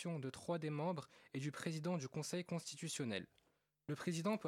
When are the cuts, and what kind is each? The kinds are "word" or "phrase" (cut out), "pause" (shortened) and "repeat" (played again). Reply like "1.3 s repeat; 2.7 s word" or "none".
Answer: none